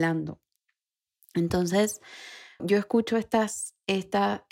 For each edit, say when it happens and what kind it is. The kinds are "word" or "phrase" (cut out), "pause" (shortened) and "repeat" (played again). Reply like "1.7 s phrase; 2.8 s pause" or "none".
2.6 s word